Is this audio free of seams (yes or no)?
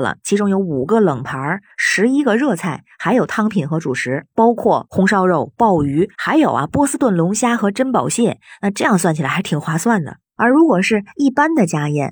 yes